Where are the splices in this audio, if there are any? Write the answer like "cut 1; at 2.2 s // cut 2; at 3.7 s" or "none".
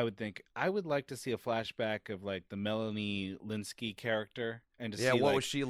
cut 1; at 4.7 s

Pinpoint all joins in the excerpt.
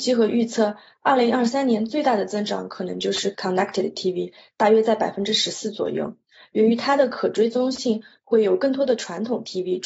none

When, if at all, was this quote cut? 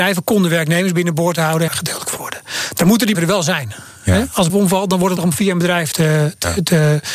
cut 1; at 1.7 s // cut 2; at 2.2 s // cut 3; at 3.1 s // cut 4; at 4.5 s // cut 5; at 5.2 s // cut 6; at 5.9 s

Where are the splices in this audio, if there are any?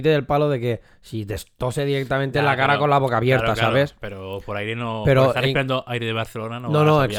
none

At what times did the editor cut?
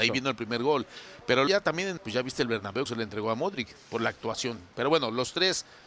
cut 1; at 1.5 s // cut 2; at 2.0 s // cut 3; at 2.9 s

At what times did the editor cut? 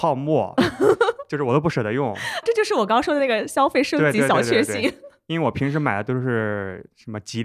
cut 1; at 2.4 s

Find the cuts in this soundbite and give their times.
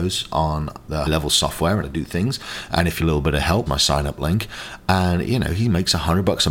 cut 1; at 1.1 s // cut 2; at 1.8 s // cut 3; at 3.0 s // cut 4; at 3.7 s

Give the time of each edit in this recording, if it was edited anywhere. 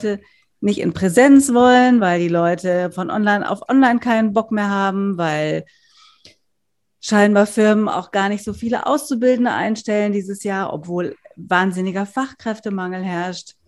none

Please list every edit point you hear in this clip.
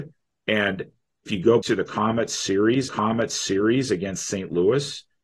cut 1; at 1.3 s // cut 2; at 1.6 s // cut 3; at 2.9 s

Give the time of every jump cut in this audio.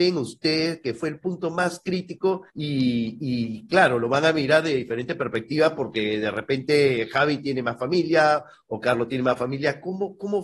cut 1; at 2.5 s

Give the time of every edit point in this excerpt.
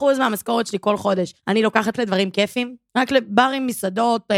cut 1; at 1.4 s // cut 2; at 1.9 s // cut 3; at 2.9 s

